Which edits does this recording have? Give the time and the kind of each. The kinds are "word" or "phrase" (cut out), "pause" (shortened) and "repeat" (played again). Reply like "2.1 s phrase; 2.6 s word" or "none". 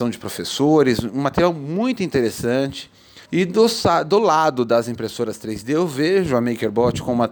3.2 s pause